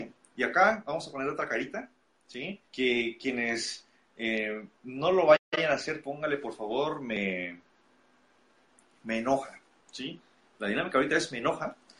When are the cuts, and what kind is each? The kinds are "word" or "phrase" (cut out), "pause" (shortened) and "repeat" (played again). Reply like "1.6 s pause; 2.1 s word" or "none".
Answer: 2.7 s pause; 4.7 s pause